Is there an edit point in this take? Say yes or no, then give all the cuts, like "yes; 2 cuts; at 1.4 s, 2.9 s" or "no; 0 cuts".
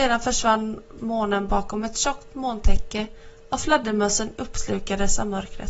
no; 0 cuts